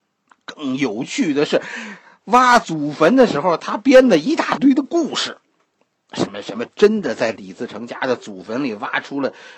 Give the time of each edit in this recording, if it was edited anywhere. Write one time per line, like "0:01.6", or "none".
none